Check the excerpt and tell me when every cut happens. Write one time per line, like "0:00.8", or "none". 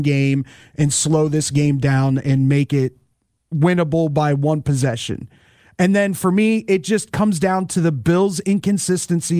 none